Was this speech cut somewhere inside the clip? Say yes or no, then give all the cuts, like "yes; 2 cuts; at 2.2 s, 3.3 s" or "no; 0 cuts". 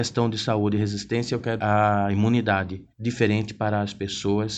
yes; 2 cuts; at 1.6 s, 2.9 s